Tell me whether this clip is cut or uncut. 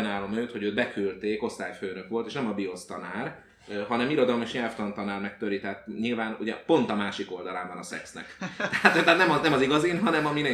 uncut